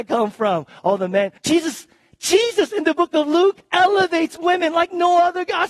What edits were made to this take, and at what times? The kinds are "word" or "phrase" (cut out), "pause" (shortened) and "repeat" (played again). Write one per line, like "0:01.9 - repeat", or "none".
0:01.4 - pause
0:03.6 - pause